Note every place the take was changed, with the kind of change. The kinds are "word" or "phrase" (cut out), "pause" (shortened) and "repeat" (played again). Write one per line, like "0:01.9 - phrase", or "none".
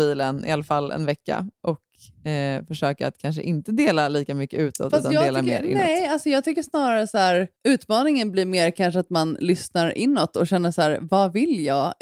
0:07.6 - pause